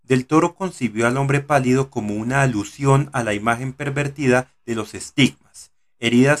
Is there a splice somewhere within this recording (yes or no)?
no